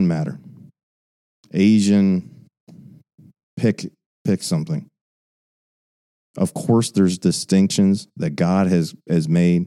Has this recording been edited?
no; 0 cuts

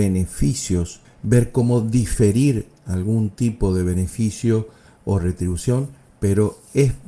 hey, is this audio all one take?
yes; 0 cuts

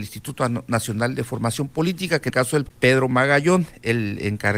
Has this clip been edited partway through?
yes; 2 cuts; at 2.3 s, 2.7 s

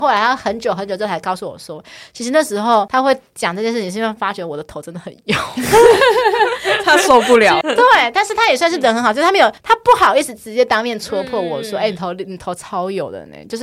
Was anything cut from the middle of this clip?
yes; 2 cuts; at 7.6 s, 9.6 s

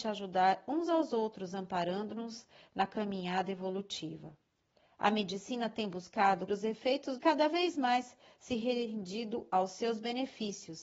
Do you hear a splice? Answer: yes; 2 cuts; at 6.5 s, 7.2 s

